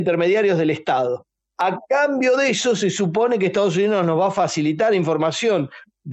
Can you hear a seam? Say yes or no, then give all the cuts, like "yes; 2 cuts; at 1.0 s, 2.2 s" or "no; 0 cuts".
no; 0 cuts